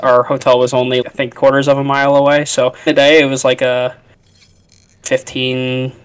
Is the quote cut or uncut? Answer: cut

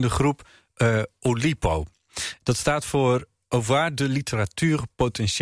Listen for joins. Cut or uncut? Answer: uncut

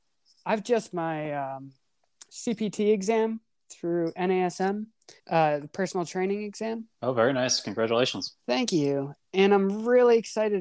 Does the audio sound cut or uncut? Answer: cut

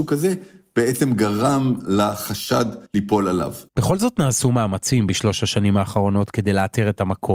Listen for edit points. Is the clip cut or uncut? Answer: cut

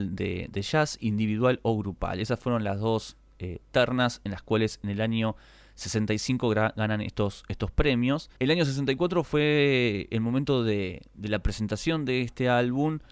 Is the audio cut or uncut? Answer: cut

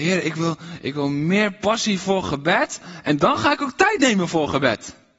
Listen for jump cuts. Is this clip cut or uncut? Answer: uncut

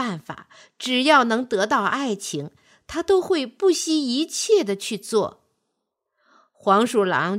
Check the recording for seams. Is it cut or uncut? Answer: uncut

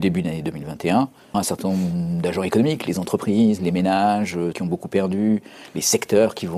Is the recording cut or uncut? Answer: cut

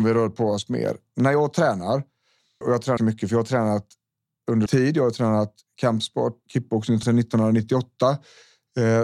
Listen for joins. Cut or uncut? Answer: cut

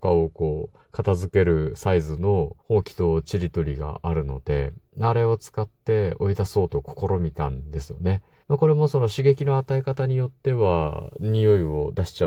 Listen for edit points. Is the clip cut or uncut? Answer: cut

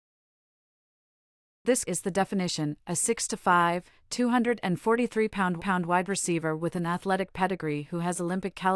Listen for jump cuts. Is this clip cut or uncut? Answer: cut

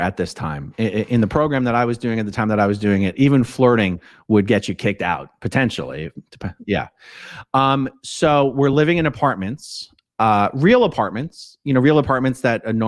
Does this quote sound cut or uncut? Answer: uncut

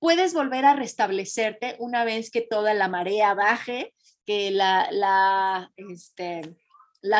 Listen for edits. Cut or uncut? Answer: uncut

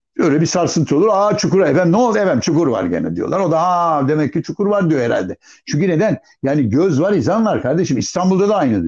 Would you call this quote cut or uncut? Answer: uncut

